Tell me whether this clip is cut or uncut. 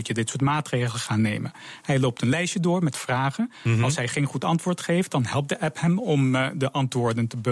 uncut